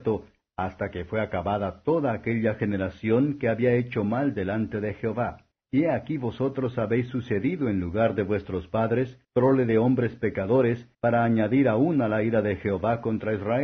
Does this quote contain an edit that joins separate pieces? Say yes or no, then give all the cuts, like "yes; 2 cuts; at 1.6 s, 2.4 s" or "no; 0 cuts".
yes; 3 cuts; at 5.5 s, 9.2 s, 10.9 s